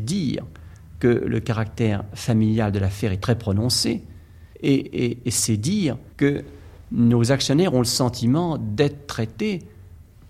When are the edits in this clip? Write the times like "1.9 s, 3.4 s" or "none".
4.5 s, 6.1 s